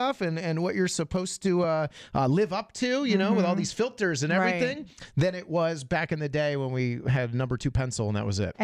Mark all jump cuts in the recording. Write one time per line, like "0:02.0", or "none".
none